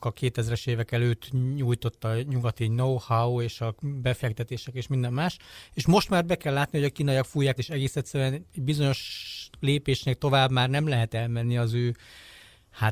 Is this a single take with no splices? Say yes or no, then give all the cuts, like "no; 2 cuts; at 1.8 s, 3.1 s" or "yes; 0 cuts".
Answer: no; 1 cut; at 7.6 s